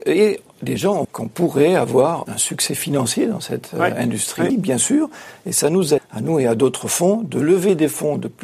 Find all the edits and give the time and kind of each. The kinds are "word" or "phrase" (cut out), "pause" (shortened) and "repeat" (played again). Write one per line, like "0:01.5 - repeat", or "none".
0:01.0 - word
0:02.2 - word
0:04.5 - word
0:06.0 - word